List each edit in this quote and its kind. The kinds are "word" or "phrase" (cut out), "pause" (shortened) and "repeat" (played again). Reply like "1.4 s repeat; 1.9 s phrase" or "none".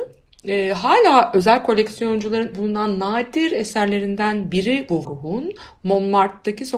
2.5 s word; 5.0 s word